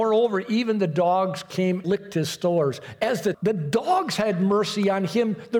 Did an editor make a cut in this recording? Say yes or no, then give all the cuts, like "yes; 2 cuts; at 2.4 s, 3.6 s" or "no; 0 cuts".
yes; 2 cuts; at 1.8 s, 3.3 s